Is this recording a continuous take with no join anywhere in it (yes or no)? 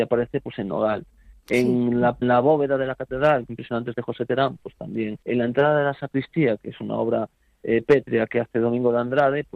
no